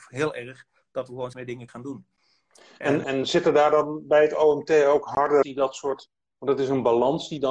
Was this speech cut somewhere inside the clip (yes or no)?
yes